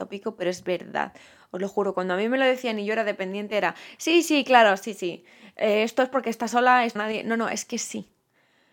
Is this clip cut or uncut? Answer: cut